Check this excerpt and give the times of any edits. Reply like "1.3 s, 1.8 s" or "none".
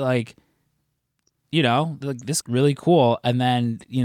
2.4 s